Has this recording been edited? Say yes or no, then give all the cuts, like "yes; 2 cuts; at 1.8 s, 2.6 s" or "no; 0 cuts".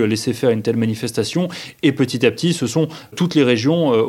no; 0 cuts